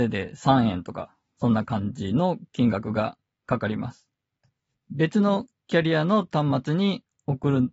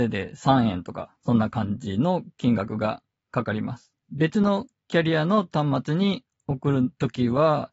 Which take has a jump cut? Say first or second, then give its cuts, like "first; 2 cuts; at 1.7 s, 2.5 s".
second; 2 cuts; at 1.2 s, 4.0 s